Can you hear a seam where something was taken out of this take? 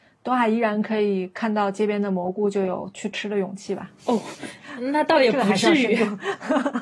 yes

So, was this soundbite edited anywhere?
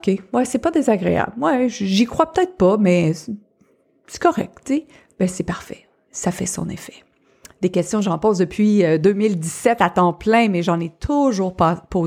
no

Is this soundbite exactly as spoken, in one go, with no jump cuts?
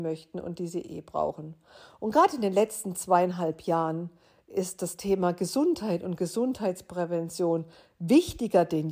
yes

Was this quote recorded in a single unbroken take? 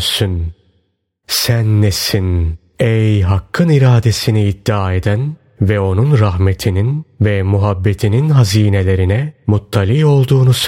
yes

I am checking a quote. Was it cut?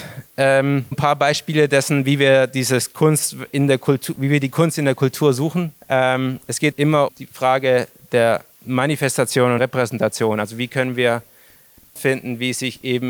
yes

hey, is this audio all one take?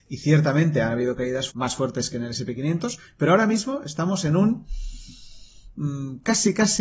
no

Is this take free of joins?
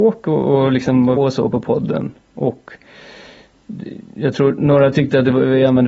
no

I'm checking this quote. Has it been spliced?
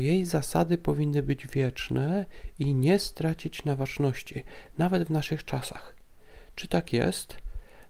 no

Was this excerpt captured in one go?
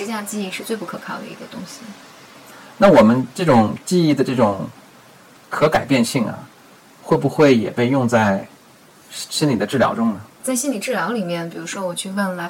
no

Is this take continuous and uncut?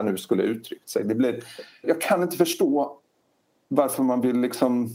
no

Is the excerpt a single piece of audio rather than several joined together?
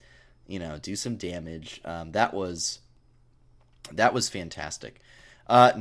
yes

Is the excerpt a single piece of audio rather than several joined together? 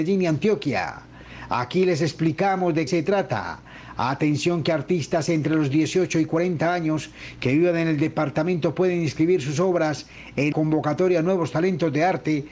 no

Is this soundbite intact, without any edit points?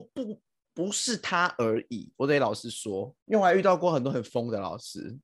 no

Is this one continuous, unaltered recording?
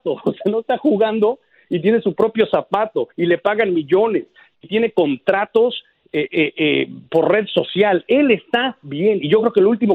no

